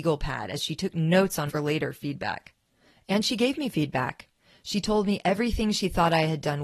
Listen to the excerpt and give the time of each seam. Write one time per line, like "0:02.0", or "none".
0:01.5